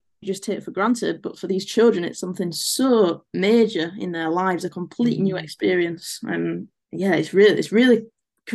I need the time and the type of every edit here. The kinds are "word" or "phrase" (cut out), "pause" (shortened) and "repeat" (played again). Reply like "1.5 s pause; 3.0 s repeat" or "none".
none